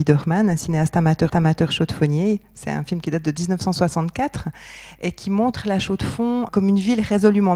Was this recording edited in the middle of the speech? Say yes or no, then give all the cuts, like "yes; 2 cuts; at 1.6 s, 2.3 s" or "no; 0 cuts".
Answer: yes; 2 cuts; at 1.3 s, 6.5 s